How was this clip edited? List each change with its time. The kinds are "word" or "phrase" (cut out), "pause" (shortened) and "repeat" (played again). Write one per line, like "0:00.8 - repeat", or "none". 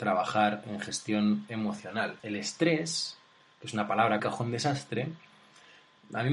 0:02.2 - pause
0:04.2 - phrase